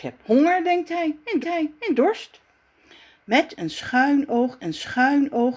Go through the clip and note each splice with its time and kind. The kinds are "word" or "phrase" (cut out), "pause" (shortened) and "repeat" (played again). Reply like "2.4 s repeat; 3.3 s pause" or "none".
1.4 s repeat; 4.6 s repeat